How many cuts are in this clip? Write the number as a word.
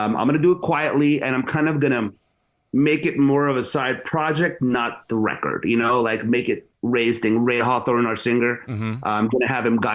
zero